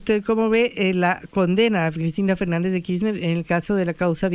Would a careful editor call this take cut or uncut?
uncut